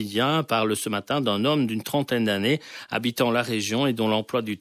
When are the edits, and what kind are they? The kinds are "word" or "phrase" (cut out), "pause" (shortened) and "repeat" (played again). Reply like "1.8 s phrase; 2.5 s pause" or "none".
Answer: none